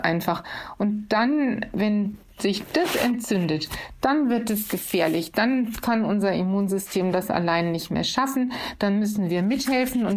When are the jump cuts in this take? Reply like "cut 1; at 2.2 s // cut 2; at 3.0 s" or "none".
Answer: none